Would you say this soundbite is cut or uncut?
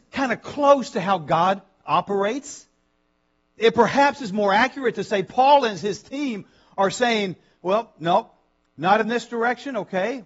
uncut